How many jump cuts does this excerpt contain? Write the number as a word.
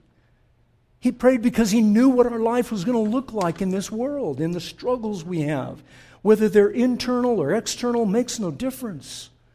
zero